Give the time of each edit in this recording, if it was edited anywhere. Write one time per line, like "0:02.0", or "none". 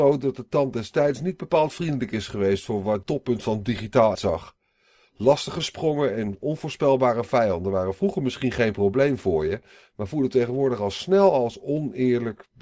0:03.0
0:04.1